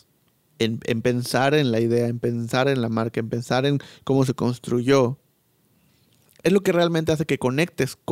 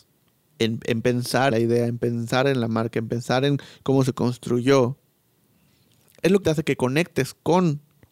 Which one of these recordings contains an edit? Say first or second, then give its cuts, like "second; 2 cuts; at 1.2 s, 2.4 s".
second; 2 cuts; at 1.5 s, 6.4 s